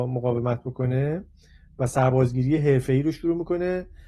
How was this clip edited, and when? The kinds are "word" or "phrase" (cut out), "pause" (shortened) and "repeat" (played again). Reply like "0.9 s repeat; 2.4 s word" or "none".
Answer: none